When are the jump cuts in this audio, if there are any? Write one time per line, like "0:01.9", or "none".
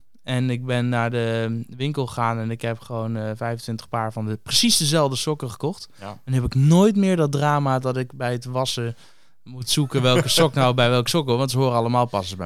none

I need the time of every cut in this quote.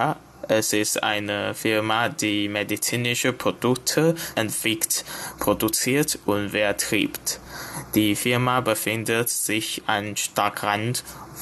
0:04.3

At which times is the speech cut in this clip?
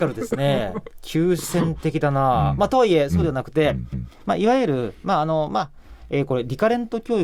0:03.9

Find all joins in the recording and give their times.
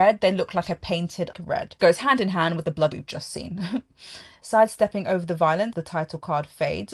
0:01.3
0:01.8
0:02.9
0:05.7

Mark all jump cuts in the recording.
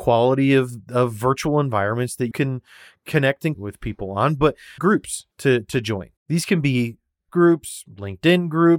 0:02.3
0:03.5
0:04.8
0:05.3
0:06.2
0:07.3

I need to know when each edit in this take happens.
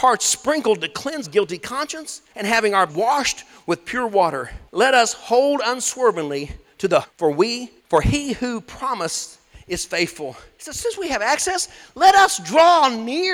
0:01.2
0:02.3
0:02.9
0:04.7
0:07.0
0:07.8

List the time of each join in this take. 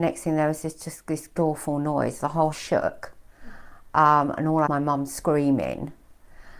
0:01.4
0:02.5
0:04.7

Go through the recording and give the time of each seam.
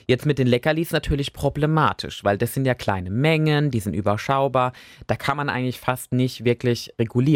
none

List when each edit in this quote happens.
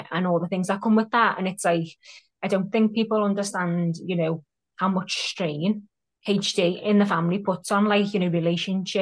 none

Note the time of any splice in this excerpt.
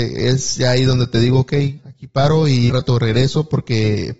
0:01.8
0:02.7

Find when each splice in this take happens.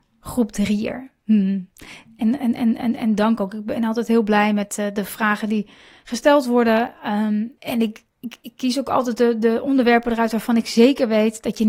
0:01.2
0:07.6
0:08.1

